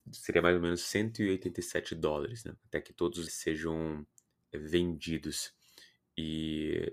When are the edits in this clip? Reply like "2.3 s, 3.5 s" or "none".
2.6 s, 3.3 s